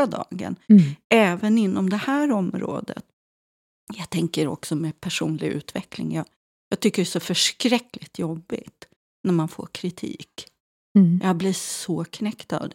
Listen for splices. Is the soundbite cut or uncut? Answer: uncut